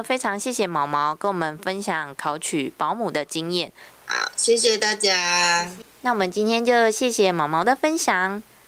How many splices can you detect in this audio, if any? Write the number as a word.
zero